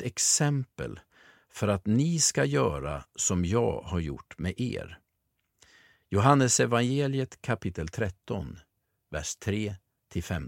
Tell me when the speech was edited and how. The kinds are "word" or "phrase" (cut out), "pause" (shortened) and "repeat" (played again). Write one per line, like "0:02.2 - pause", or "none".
none